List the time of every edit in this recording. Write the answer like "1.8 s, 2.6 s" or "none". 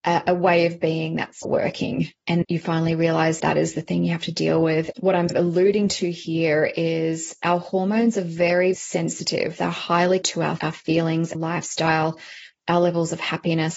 1.4 s, 2.4 s, 3.4 s, 4.9 s, 5.3 s, 8.7 s, 10.2 s, 10.6 s, 11.3 s